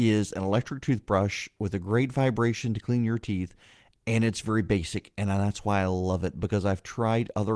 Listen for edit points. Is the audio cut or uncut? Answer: uncut